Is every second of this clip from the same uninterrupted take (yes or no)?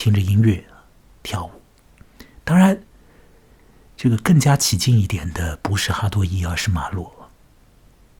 yes